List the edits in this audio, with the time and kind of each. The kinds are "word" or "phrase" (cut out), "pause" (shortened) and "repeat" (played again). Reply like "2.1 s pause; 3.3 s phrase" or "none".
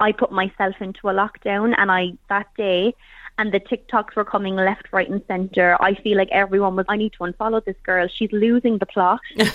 2.2 s phrase; 6.8 s word